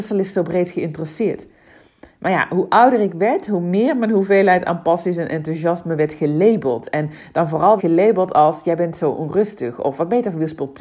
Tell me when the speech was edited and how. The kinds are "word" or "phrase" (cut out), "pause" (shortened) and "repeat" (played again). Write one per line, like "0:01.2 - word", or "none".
0:07.8 - word